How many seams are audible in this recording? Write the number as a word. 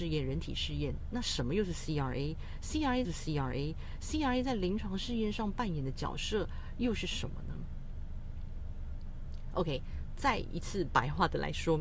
one